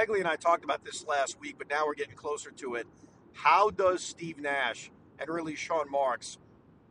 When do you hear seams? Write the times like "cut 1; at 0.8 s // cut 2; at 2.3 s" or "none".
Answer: none